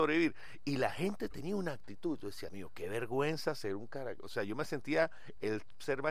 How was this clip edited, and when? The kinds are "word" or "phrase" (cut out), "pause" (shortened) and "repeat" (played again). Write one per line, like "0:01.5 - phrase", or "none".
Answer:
0:02.5 - word